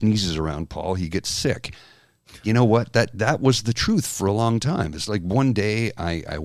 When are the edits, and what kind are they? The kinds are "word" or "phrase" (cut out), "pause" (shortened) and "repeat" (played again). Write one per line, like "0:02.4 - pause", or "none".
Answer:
none

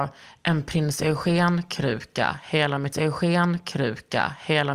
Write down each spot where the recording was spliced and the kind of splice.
0:02.9 - repeat

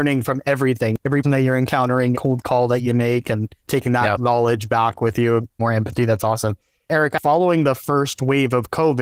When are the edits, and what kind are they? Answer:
0:01.2 - word
0:02.1 - word
0:03.6 - pause
0:05.6 - word

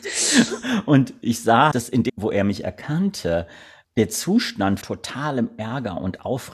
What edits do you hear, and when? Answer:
0:01.7 - word
0:02.1 - word
0:03.8 - word
0:04.8 - word

